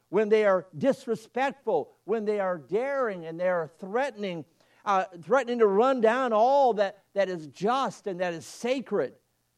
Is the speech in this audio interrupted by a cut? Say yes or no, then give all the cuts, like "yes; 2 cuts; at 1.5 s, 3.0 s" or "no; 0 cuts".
no; 0 cuts